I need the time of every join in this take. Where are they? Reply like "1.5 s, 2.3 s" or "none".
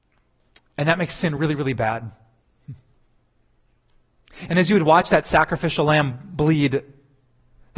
none